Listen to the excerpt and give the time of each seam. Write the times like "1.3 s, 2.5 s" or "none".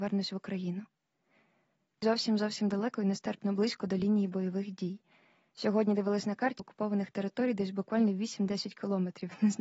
2.0 s, 6.6 s